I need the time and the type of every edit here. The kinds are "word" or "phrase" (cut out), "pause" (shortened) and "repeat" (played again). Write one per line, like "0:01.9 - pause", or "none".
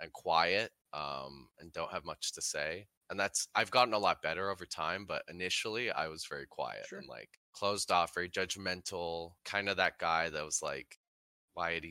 0:07.4 - pause
0:09.4 - pause